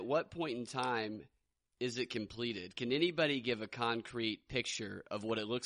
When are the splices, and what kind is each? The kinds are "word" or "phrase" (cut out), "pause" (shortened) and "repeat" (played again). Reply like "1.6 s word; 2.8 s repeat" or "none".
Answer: none

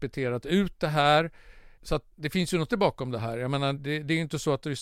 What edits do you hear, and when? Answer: 2.1 s pause; 2.7 s word; 3.8 s word

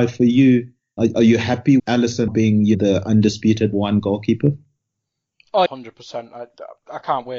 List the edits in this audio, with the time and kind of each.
1.0 s word; 1.8 s word; 2.3 s word; 2.7 s word; 3.7 s word; 5.7 s word

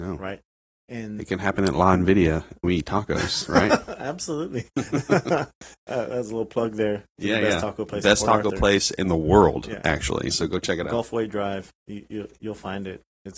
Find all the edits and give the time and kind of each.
2.6 s word

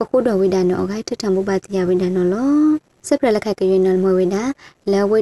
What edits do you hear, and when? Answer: 2.9 s pause

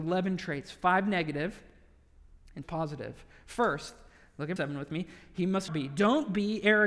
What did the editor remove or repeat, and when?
2.6 s word; 4.6 s word; 5.7 s word

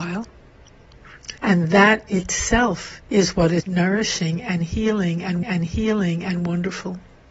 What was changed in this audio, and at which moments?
1.4 s pause; 3.0 s pause; 3.6 s word; 5.4 s repeat

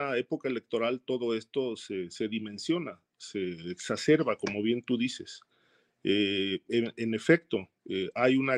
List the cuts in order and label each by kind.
none

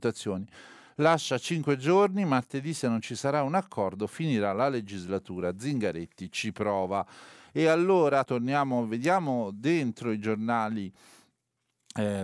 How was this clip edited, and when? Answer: 8.2 s word

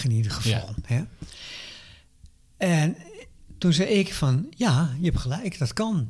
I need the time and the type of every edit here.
none

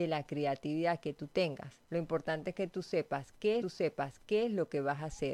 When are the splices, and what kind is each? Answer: 1.8 s pause; 3.6 s repeat

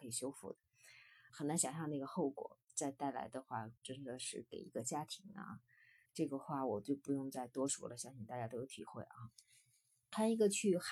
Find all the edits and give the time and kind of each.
1.3 s word; 2.6 s pause; 3.8 s pause; 6.0 s word

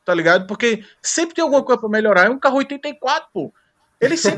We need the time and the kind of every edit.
none

